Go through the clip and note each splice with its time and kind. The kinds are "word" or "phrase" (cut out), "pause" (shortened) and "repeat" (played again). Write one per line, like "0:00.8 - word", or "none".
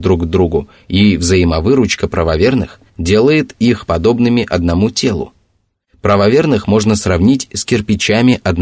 0:02.9 - pause